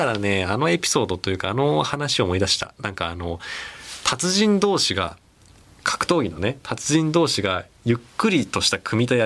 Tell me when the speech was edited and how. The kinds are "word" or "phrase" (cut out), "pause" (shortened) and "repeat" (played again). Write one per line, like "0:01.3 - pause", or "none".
none